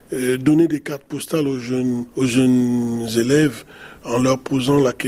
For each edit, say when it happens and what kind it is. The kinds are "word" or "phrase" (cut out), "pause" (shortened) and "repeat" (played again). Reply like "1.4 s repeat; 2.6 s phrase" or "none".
2.1 s pause

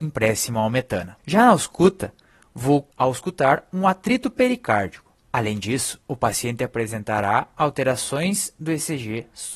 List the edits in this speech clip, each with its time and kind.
1.2 s pause; 2.9 s pause; 5.2 s pause; 6.0 s pause

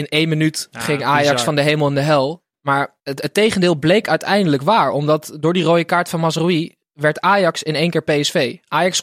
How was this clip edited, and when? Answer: 3.0 s pause

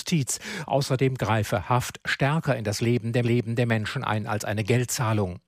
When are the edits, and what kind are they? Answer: 3.2 s repeat

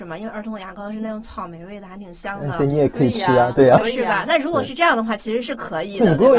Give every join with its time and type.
3.8 s phrase

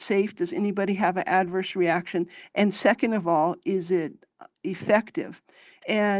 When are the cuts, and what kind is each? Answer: none

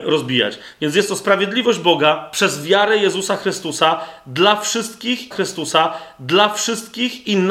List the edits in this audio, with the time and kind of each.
5.3 s repeat

